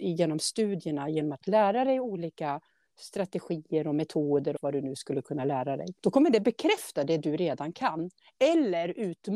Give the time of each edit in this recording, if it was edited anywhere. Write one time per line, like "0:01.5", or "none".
0:04.6
0:06.0

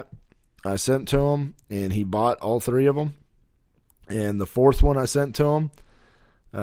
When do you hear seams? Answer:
none

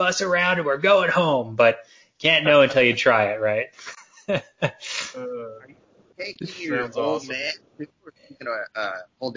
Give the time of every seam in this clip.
none

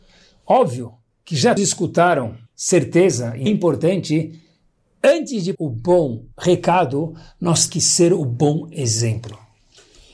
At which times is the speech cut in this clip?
0:01.1
0:01.6
0:02.5
0:03.5
0:05.5
0:06.3
0:07.7

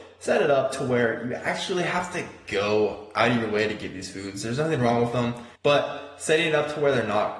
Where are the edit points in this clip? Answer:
0:05.6

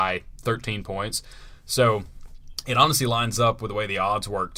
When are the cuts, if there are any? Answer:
none

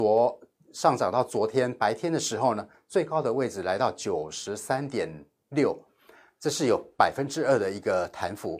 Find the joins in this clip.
none

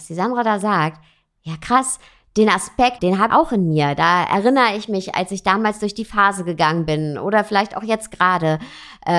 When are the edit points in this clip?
0:03.0
0:03.3

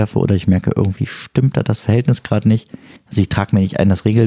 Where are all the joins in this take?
0:03.0

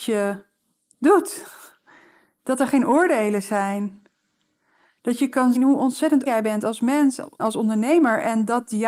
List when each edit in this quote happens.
0:05.6
0:06.3
0:07.4

